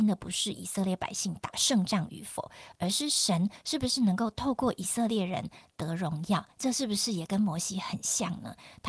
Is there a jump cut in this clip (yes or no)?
yes